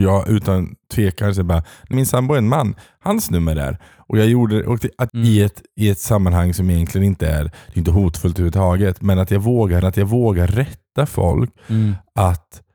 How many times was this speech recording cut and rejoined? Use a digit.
3